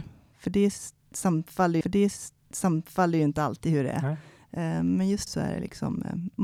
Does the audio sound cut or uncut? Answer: cut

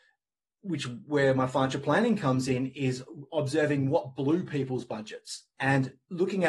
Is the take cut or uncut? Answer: uncut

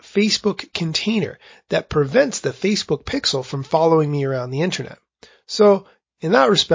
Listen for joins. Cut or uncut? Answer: uncut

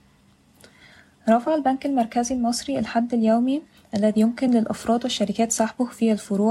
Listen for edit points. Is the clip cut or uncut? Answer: uncut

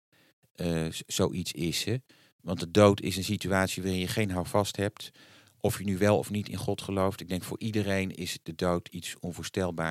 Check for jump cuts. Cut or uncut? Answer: uncut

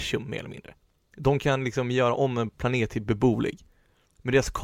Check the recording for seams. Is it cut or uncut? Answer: uncut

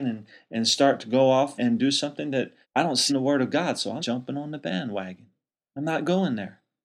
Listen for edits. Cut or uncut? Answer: cut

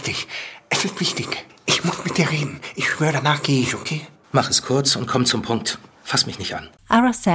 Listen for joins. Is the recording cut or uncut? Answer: uncut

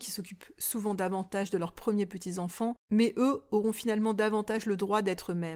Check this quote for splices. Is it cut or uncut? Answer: cut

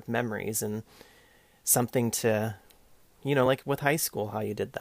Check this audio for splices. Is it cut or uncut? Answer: uncut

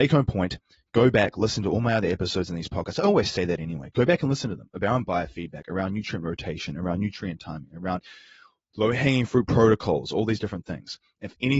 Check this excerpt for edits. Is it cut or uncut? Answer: uncut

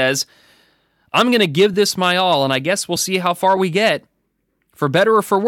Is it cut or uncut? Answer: uncut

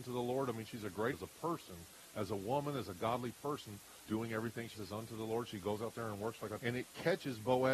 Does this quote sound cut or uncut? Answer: cut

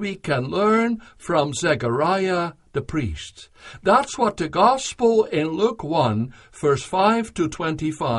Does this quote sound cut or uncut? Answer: uncut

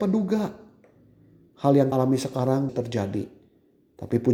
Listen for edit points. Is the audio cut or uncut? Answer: cut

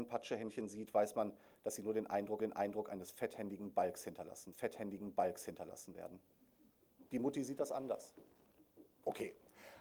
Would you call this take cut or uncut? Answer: cut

